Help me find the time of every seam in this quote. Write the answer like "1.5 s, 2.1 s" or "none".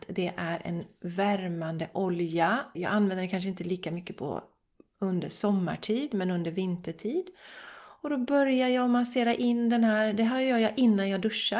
2.7 s